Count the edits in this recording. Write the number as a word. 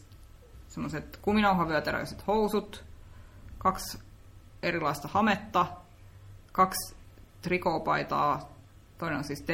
one